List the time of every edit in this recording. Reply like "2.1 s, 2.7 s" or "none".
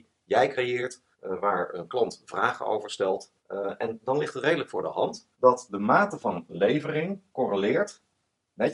1.1 s, 3.4 s, 5.3 s